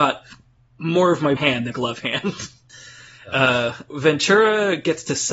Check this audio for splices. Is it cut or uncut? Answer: cut